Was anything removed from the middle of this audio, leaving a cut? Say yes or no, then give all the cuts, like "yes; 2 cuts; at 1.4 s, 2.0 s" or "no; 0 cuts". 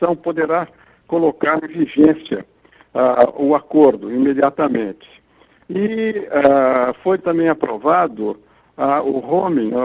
no; 0 cuts